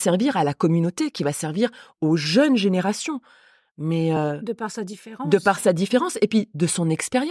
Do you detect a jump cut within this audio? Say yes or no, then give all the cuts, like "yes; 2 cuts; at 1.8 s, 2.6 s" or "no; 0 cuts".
no; 0 cuts